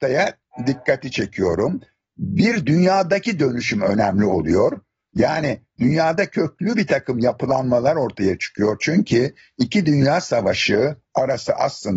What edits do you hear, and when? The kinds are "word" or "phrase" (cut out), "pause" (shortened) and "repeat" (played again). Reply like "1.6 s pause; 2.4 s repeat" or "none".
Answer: none